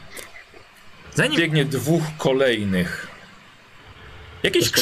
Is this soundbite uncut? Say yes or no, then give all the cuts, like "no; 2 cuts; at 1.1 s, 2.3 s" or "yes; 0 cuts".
no; 1 cut; at 1.4 s